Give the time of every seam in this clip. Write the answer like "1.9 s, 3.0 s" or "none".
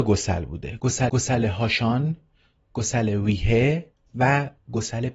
1.1 s